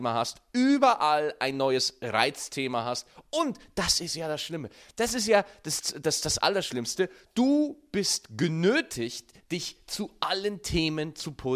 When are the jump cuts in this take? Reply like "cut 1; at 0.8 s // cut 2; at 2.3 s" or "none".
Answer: none

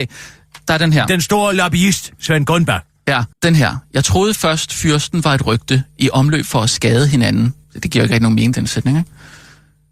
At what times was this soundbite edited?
cut 1; at 3.3 s // cut 2; at 7.6 s

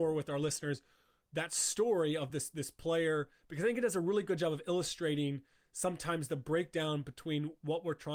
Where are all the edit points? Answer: none

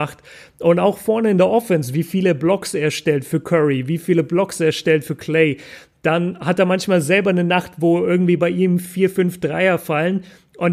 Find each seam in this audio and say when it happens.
none

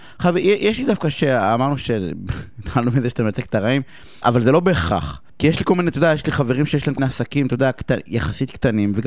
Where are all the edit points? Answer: cut 1; at 1.1 s // cut 2; at 4.2 s // cut 3; at 5.3 s // cut 4; at 7.0 s

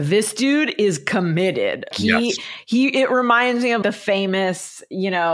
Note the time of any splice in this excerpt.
cut 1; at 1.9 s // cut 2; at 3.8 s

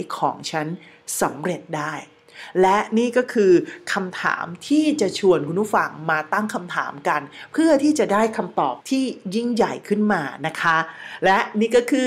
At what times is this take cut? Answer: cut 1; at 8.8 s

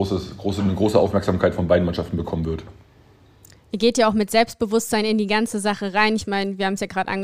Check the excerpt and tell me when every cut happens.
none

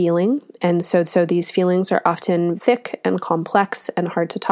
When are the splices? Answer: cut 1; at 1.0 s // cut 2; at 2.6 s

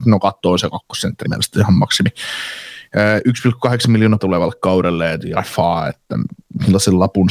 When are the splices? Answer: cut 1; at 1.2 s // cut 2; at 4.2 s // cut 3; at 5.4 s

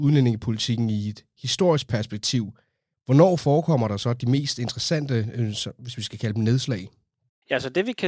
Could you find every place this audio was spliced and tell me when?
none

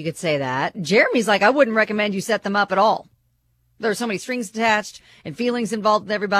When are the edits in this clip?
none

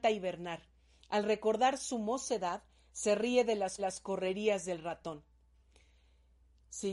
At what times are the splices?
cut 1; at 3.8 s

